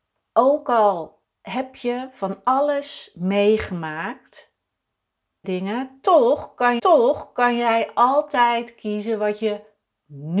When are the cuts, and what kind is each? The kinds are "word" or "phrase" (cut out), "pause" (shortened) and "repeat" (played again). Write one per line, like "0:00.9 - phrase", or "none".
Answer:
0:01.2 - pause
0:05.4 - phrase
0:06.8 - repeat